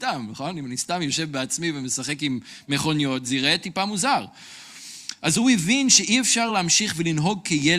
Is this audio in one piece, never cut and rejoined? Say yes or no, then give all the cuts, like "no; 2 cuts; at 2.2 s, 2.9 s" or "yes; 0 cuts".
yes; 0 cuts